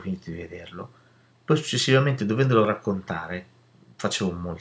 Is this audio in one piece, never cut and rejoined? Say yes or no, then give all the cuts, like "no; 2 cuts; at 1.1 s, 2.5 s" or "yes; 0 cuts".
yes; 0 cuts